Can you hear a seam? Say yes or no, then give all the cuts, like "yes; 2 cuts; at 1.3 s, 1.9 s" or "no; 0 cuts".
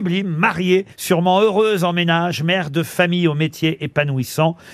yes; 1 cut; at 0.9 s